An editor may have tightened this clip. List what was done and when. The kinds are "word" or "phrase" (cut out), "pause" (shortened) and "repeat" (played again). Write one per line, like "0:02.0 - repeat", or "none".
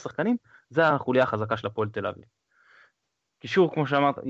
none

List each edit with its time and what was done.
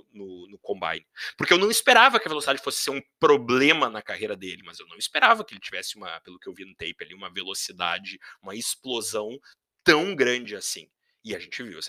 none

